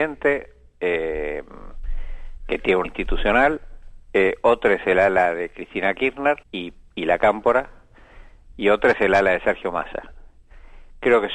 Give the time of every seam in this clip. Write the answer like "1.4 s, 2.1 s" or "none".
2.8 s, 6.4 s